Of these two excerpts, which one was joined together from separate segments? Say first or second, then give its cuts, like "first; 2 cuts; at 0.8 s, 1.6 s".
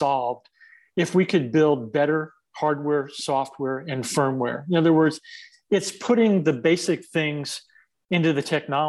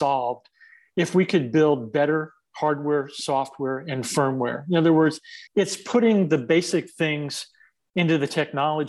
second; 1 cut; at 5.5 s